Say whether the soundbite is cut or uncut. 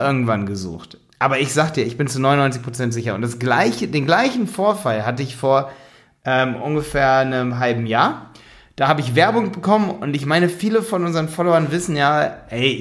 uncut